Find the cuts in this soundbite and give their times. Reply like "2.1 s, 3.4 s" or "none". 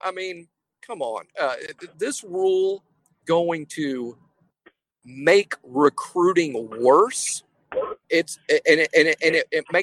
1.9 s, 3.2 s, 8.0 s, 8.9 s